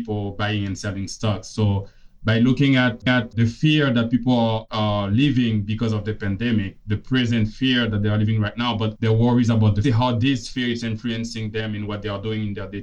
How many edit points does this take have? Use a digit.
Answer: 3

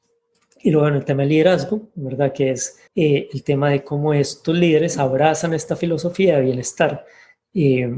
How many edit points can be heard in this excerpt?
1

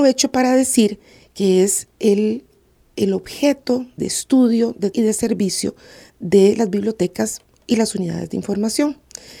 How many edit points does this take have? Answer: 2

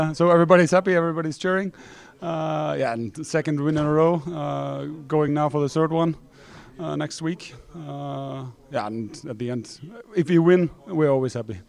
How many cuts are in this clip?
0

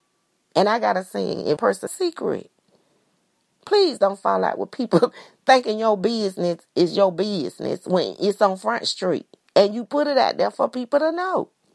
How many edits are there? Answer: 2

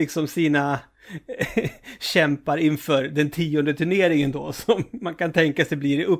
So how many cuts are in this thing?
0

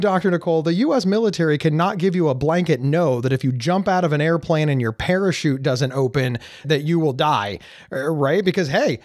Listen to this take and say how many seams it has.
1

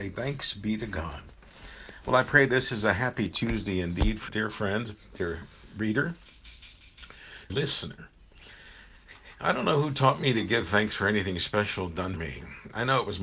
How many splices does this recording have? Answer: 3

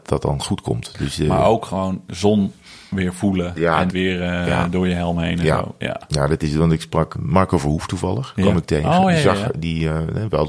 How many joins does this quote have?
2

